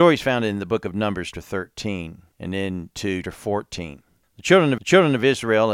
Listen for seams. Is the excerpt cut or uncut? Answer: cut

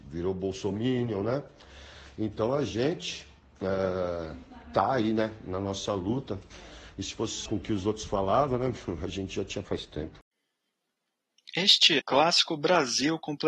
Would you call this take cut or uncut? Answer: cut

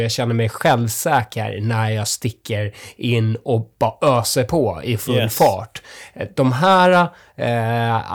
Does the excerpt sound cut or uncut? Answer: uncut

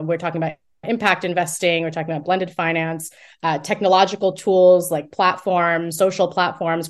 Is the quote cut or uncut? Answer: uncut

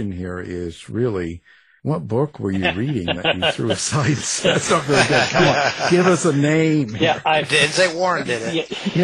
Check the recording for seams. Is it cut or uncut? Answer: uncut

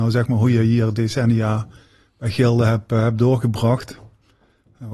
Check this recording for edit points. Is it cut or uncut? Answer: uncut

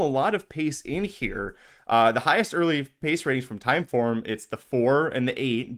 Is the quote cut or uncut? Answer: uncut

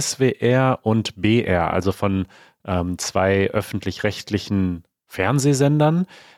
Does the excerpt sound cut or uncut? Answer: uncut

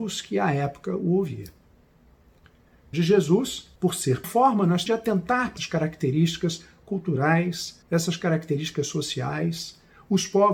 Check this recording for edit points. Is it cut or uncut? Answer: cut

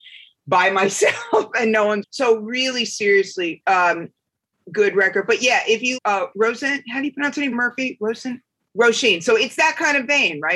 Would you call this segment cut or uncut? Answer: cut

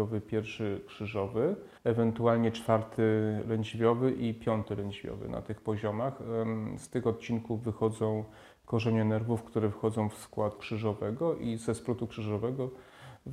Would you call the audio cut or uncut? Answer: cut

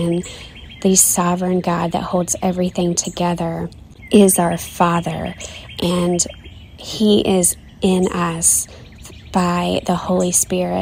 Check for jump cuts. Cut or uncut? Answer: uncut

